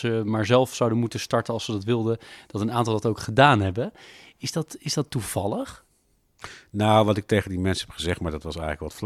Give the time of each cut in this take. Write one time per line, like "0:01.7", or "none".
none